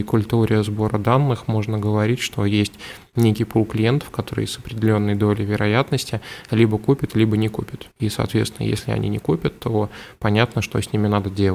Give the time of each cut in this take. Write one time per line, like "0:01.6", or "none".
0:07.9